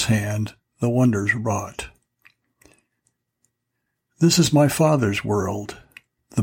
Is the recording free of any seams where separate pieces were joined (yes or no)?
yes